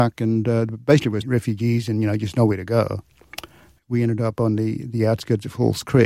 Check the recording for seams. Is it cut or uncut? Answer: cut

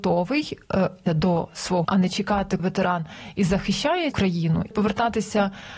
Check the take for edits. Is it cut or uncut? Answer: cut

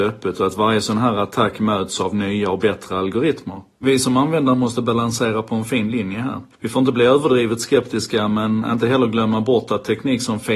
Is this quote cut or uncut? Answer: cut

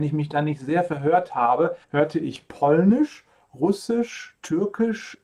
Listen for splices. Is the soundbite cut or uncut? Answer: cut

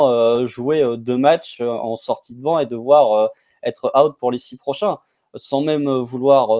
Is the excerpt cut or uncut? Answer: uncut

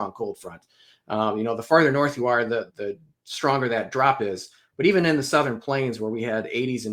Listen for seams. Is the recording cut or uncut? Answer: cut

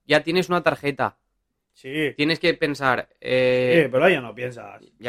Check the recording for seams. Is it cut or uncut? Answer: uncut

